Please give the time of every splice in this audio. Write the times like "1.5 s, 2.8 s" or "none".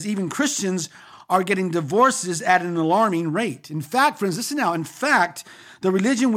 none